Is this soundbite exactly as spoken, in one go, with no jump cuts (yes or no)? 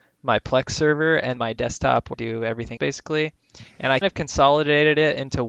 no